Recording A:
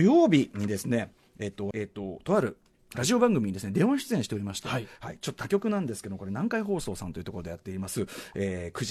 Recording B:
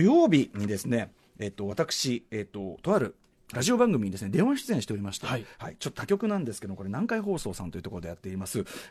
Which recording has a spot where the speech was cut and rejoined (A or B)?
A